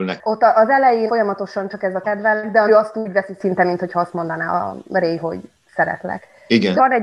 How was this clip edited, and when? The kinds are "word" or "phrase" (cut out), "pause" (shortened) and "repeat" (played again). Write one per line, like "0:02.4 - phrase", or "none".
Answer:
0:01.1 - word
0:02.0 - word
0:02.7 - word